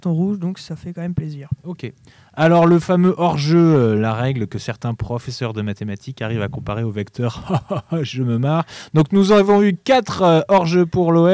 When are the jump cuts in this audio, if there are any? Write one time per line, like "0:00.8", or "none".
none